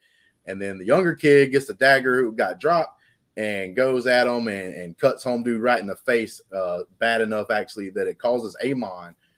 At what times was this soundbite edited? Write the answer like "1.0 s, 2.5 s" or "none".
none